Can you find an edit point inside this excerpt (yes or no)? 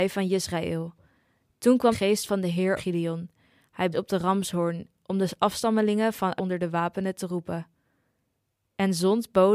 yes